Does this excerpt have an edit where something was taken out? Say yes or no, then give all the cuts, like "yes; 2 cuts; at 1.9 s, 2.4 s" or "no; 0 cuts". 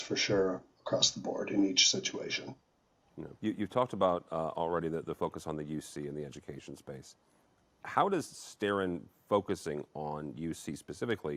yes; 1 cut; at 3.4 s